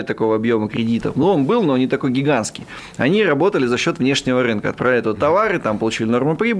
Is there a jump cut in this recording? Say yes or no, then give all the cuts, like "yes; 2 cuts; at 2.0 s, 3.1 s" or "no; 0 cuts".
no; 0 cuts